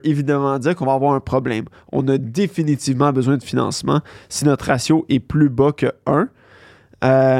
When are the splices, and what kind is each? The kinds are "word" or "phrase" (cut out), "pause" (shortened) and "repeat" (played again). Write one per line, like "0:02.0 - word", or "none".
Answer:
none